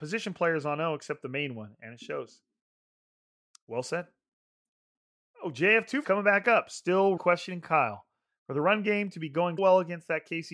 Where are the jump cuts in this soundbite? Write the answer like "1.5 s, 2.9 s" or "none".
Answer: 6.0 s, 7.2 s, 9.6 s